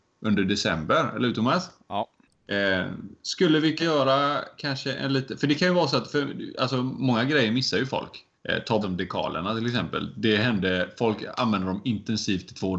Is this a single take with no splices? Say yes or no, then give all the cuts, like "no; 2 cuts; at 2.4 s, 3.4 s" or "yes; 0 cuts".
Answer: no; 4 cuts; at 2.2 s, 3.8 s, 8.3 s, 8.8 s